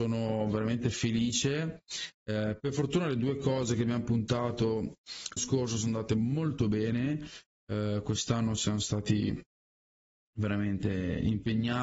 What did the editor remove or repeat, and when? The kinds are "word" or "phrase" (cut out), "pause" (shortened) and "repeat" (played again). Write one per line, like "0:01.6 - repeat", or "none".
0:05.4 - word